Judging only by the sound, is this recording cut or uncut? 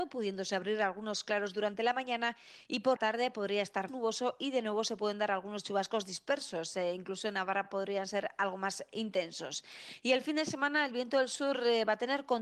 cut